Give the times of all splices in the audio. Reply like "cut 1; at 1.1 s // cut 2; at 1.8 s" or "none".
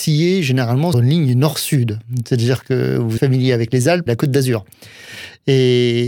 cut 1; at 0.9 s // cut 2; at 3.2 s // cut 3; at 4.1 s

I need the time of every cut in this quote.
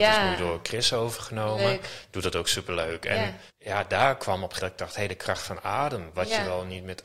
cut 1; at 3.5 s // cut 2; at 4.6 s

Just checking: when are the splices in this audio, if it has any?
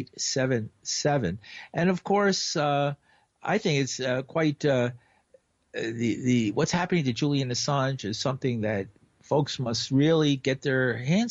none

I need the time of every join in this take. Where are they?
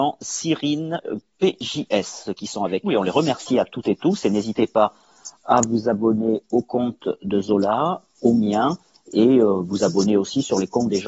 cut 1; at 2.8 s

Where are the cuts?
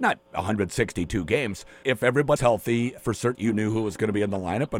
cut 1; at 1.8 s // cut 2; at 2.4 s // cut 3; at 3.0 s // cut 4; at 3.3 s

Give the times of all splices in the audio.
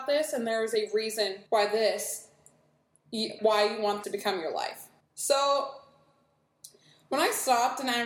cut 1; at 1.5 s // cut 2; at 3.4 s // cut 3; at 4.0 s // cut 4; at 5.0 s

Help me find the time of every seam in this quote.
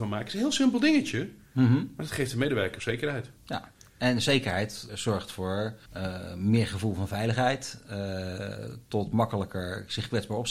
cut 1; at 3.4 s // cut 2; at 4.9 s // cut 3; at 5.9 s

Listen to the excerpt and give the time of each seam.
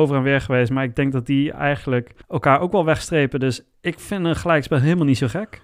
cut 1; at 2.2 s

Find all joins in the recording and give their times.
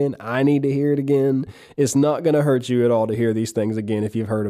none

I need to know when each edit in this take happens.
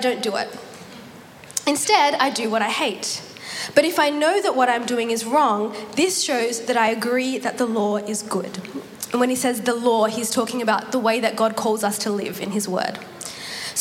none

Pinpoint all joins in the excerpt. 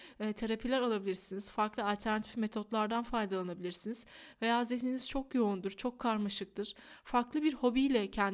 none

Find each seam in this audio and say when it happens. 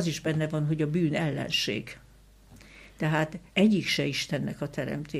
cut 1; at 3.5 s

